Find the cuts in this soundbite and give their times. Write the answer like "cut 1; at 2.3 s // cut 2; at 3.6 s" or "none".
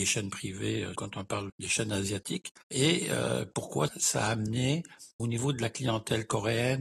cut 1; at 0.9 s // cut 2; at 1.5 s // cut 3; at 2.6 s // cut 4; at 3.9 s // cut 5; at 5.2 s